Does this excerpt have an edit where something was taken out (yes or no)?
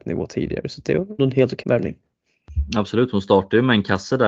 yes